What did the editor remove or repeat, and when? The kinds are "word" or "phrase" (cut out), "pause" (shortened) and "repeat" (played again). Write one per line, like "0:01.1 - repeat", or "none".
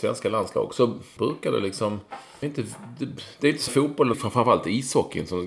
0:01.2 - word
0:02.4 - word
0:03.7 - word
0:04.1 - word